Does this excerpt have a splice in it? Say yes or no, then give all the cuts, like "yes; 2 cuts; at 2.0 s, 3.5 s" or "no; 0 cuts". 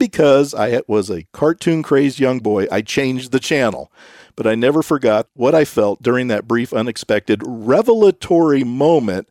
no; 0 cuts